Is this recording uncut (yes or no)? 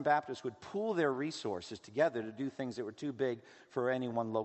yes